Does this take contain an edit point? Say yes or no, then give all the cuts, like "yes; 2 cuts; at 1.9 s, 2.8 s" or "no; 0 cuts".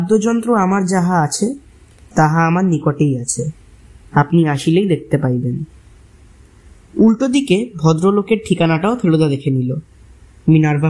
no; 0 cuts